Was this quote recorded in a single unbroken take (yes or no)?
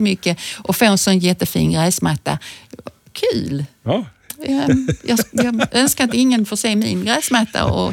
yes